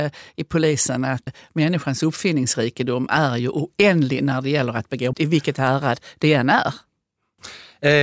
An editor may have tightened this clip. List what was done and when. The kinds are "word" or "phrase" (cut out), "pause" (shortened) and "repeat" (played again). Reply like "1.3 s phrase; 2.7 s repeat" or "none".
1.3 s word; 5.1 s word